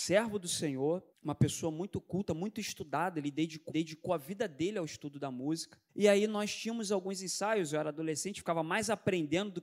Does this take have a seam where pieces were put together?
yes; 3 cuts; at 1.1 s, 3.7 s, 5.9 s

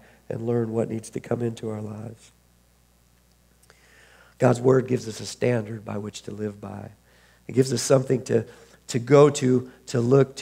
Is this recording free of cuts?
yes; 0 cuts

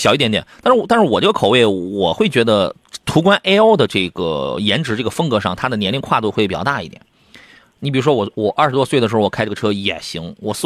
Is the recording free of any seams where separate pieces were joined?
yes; 0 cuts

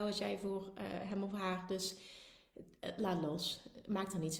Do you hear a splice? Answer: no; 0 cuts

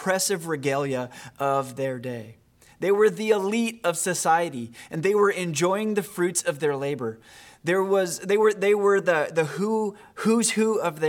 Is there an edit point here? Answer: no; 0 cuts

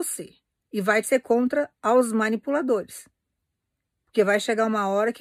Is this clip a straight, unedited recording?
no; 1 cut; at 1.0 s

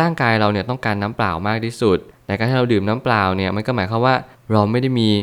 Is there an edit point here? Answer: no; 0 cuts

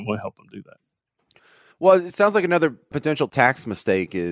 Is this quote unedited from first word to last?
yes; 0 cuts

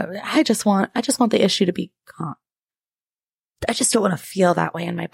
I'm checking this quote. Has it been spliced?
no; 0 cuts

